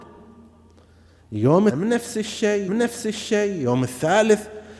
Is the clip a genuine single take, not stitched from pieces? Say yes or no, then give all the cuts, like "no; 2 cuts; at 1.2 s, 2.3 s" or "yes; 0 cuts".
no; 2 cuts; at 1.7 s, 2.7 s